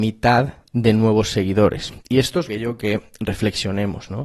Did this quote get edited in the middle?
yes; 2 cuts; at 2.5 s, 2.8 s

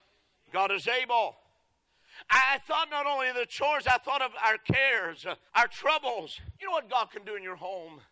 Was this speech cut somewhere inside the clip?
yes; 2 cuts; at 5.5 s, 6.5 s

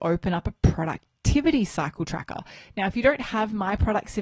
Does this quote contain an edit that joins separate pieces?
no; 0 cuts

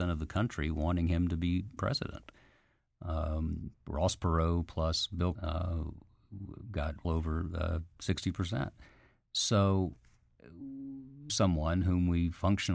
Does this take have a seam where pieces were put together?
yes; 4 cuts; at 1.8 s, 5.3 s, 7.0 s, 11.3 s

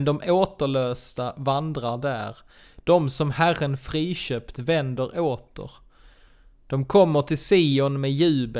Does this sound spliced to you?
no; 0 cuts

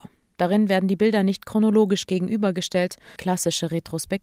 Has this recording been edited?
yes; 1 cut; at 3.2 s

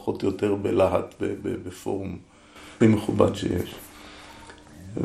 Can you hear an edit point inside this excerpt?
yes; 1 cut; at 2.8 s

